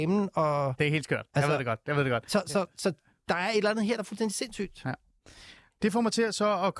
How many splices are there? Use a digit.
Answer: 0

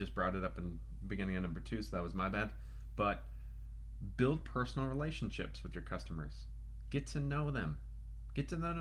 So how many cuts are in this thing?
0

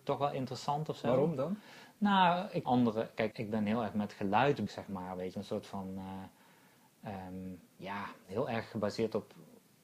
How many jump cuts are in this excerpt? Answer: 5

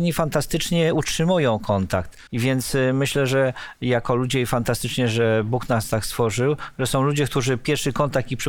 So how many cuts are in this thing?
1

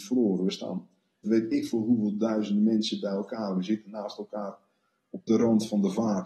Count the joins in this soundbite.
1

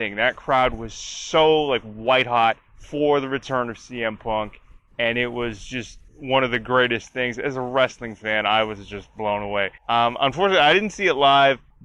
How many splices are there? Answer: 1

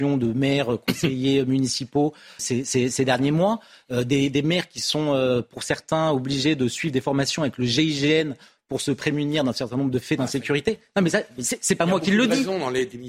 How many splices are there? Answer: 1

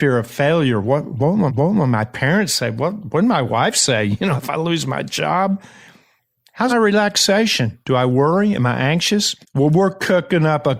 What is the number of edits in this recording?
4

